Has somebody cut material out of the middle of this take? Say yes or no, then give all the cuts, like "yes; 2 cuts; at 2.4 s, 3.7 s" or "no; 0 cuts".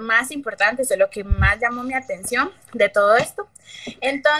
yes; 1 cut; at 2.6 s